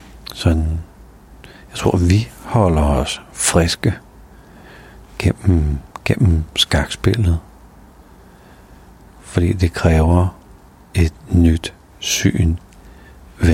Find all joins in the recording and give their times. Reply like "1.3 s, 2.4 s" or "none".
none